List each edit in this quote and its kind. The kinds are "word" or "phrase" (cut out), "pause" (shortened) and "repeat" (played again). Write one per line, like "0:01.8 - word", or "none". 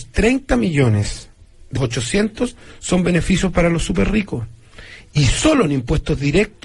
0:01.8 - word